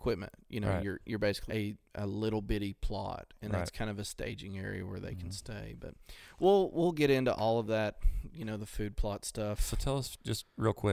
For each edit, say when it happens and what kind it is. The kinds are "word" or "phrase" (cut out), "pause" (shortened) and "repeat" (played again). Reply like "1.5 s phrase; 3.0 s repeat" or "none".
1.5 s phrase; 1.8 s pause